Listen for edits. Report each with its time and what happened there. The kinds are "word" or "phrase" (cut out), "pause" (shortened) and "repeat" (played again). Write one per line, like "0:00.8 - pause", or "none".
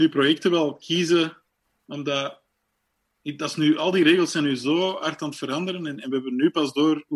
none